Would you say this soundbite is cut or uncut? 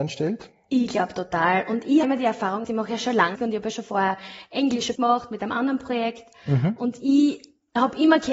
cut